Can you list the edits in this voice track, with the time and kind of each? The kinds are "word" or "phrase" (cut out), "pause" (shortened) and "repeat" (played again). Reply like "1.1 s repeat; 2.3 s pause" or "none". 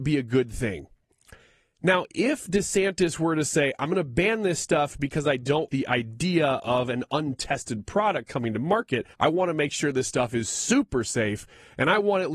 5.7 s word; 9.1 s pause